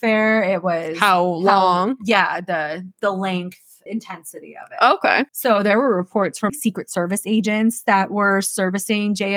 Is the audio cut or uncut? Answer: cut